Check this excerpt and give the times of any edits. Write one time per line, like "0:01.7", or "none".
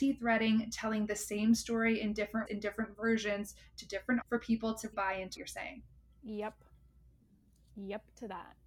0:02.5
0:04.2
0:04.9
0:05.4